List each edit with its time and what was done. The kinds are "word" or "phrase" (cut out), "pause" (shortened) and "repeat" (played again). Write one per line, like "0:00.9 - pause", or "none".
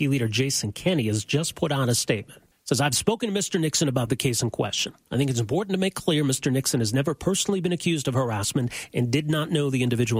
0:02.5 - pause